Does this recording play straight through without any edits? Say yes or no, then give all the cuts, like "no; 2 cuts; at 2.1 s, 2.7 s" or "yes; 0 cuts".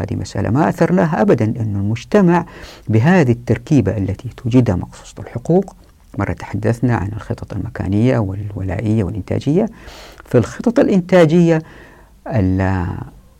yes; 0 cuts